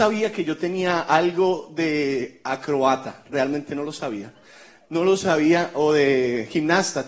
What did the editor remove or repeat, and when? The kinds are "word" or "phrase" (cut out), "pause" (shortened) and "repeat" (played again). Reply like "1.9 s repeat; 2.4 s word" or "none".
none